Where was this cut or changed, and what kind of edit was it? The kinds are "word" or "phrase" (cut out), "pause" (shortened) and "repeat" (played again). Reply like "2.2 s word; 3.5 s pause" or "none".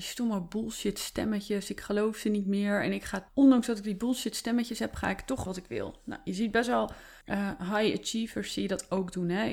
3.3 s word; 5.5 s phrase; 7.2 s pause